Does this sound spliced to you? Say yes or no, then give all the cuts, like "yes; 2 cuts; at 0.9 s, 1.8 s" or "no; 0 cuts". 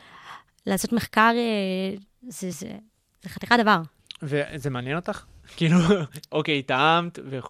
no; 0 cuts